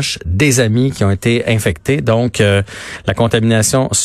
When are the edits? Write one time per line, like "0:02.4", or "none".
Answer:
none